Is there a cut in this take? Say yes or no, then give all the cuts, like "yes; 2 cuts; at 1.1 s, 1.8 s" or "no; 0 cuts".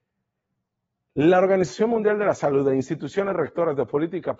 no; 0 cuts